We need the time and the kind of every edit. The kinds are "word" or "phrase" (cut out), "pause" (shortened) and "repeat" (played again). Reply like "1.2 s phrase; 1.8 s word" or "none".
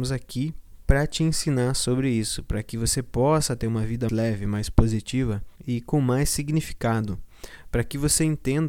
4.1 s word; 5.6 s pause